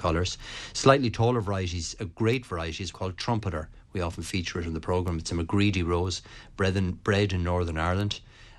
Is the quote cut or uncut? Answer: cut